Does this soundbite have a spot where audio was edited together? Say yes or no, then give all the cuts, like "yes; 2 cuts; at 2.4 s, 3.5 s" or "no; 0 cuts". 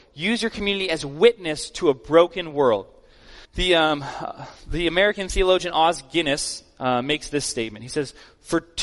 yes; 1 cut; at 3.4 s